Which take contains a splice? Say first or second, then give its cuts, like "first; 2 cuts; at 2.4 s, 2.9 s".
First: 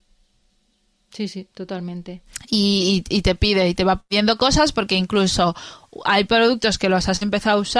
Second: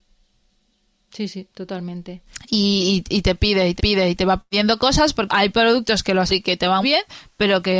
second; 4 cuts; at 3.8 s, 5.3 s, 6.3 s, 6.8 s